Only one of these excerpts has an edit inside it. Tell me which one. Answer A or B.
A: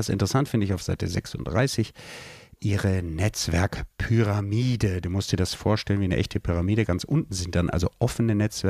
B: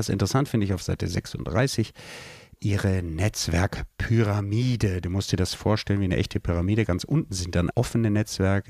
B